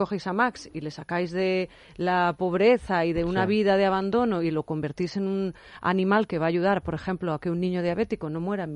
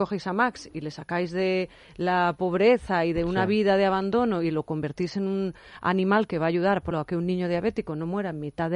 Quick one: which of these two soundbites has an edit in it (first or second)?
second